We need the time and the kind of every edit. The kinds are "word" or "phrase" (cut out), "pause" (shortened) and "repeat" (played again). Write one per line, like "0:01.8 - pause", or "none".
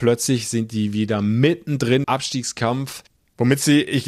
0:02.0 - word

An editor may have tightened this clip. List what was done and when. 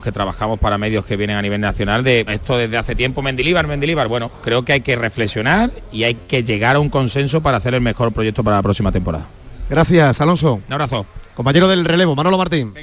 0:02.3 - word

